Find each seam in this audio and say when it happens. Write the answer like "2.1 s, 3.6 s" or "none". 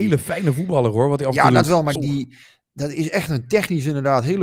2.0 s